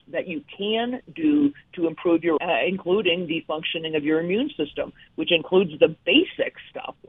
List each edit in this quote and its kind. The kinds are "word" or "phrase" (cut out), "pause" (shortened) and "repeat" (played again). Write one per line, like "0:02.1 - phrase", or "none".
0:02.4 - phrase